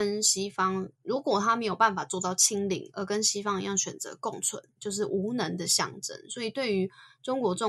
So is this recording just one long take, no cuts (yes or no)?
no